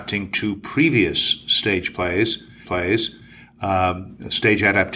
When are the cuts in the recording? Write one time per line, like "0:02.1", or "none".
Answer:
0:02.6